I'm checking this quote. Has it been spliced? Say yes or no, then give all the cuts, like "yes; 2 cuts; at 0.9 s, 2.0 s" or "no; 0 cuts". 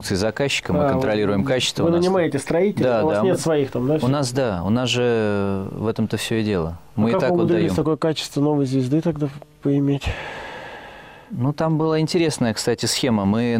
no; 0 cuts